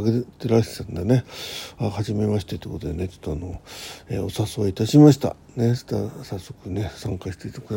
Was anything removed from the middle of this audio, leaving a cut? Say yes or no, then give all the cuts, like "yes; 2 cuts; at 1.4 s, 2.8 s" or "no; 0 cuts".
no; 0 cuts